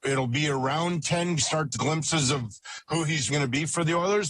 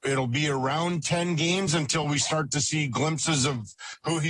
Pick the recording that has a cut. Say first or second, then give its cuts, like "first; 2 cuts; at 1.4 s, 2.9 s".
first; 3 cuts; at 1.4 s, 1.8 s, 3.3 s